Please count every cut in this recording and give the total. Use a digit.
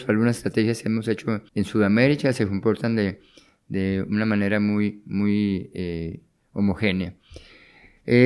1